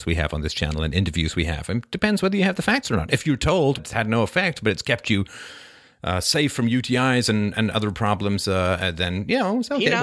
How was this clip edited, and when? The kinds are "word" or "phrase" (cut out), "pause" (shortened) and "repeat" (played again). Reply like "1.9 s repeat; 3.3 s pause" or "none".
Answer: 3.8 s word